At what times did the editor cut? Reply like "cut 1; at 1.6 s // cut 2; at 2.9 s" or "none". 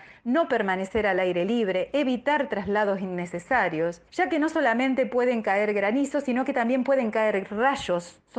cut 1; at 4.1 s